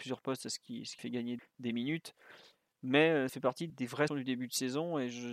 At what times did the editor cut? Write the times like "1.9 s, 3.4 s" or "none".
1.0 s, 1.4 s, 3.3 s, 3.7 s, 4.1 s